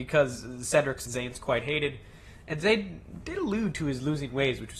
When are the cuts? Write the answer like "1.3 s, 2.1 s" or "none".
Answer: 1.1 s